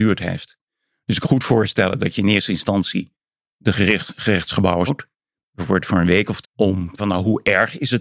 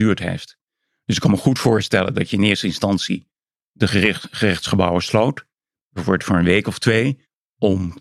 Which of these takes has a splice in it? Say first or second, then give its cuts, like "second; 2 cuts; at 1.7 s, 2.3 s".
first; 4 cuts; at 1.2 s, 4.9 s, 6.4 s, 7.0 s